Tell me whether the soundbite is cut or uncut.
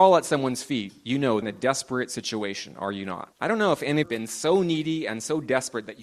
cut